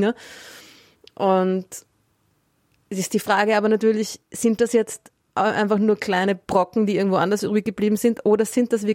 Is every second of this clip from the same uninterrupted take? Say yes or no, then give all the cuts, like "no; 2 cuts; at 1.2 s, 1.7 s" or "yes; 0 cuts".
yes; 0 cuts